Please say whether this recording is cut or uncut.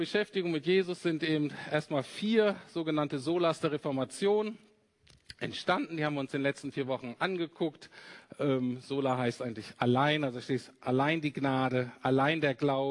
uncut